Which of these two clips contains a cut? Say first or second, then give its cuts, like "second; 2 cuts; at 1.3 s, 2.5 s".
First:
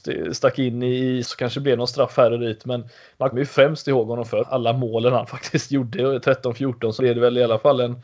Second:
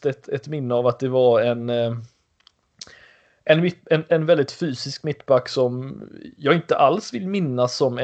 first; 4 cuts; at 1.2 s, 3.3 s, 4.4 s, 7.0 s